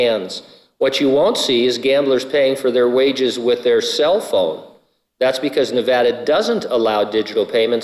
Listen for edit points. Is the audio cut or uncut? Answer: uncut